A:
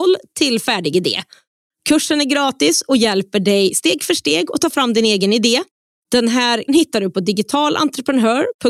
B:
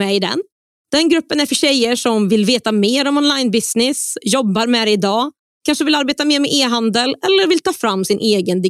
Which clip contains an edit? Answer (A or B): A